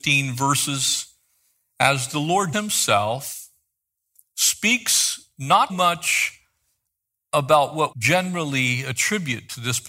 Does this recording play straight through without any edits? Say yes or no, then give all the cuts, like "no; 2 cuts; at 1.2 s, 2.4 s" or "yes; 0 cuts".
no; 3 cuts; at 2.5 s, 5.7 s, 7.9 s